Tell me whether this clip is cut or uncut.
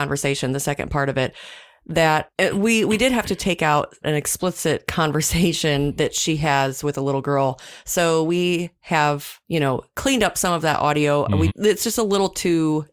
cut